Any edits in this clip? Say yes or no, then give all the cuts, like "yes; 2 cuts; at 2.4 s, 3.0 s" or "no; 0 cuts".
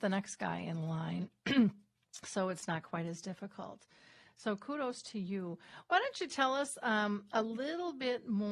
no; 0 cuts